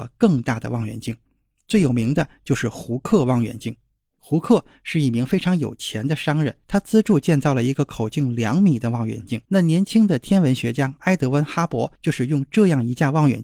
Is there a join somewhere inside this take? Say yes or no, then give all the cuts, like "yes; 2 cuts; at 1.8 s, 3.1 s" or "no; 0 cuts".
yes; 3 cuts; at 6.6 s, 9.5 s, 12.0 s